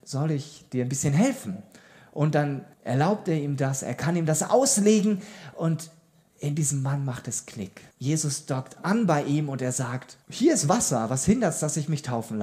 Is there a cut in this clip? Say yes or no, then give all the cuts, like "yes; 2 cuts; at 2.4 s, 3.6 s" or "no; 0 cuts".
yes; 3 cuts; at 2.7 s, 7.9 s, 10.2 s